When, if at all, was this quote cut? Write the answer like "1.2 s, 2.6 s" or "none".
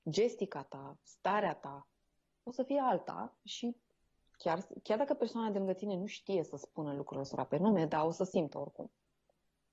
3.4 s